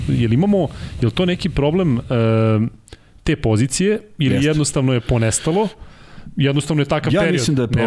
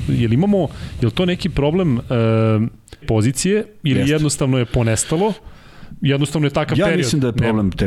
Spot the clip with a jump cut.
second; 1 cut; at 3.0 s

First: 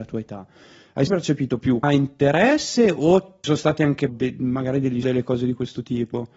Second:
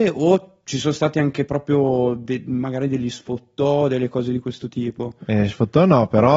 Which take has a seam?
first; 5 cuts; at 1.1 s, 1.8 s, 3.4 s, 4.1 s, 5.0 s

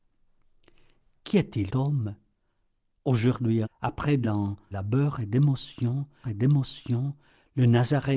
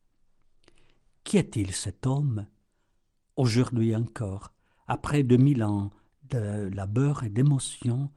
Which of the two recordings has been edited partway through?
first; 5 cuts; at 1.7 s, 3.6 s, 4.2 s, 4.7 s, 6.2 s

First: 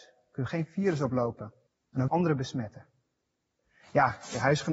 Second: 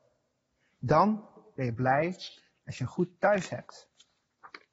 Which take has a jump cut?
first; 2 cuts; at 1.7 s, 2.1 s

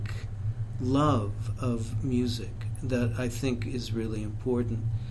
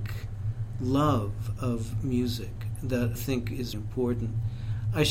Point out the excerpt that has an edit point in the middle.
second; 2 cuts; at 3.2 s, 3.7 s

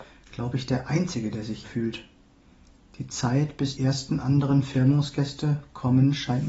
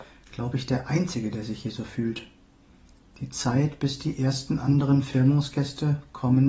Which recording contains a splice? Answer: first; 2 cuts; at 1.6 s, 3.8 s

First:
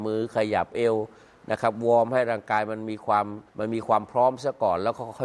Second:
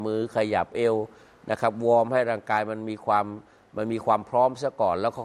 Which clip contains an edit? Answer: first; 1 cut; at 3.5 s

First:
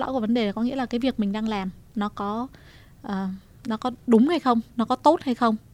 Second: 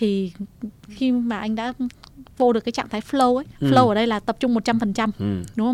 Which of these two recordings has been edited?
second; 1 cut; at 3.5 s

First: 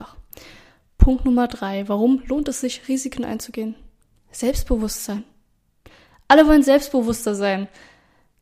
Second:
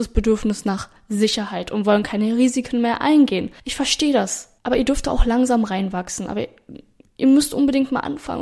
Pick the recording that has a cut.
second; 2 cuts; at 3.6 s, 4.6 s

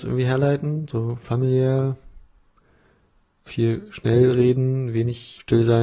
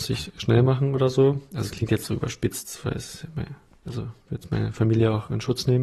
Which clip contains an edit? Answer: first; 1 cut; at 3.5 s

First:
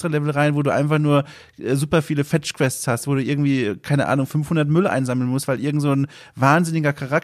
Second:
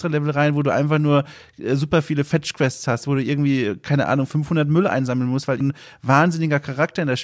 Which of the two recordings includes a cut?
second; 1 cut; at 5.6 s

